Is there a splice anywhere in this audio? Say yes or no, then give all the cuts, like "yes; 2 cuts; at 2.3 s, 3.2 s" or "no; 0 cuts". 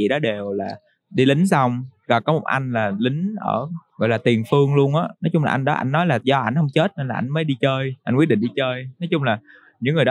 yes; 2 cuts; at 3.9 s, 8.0 s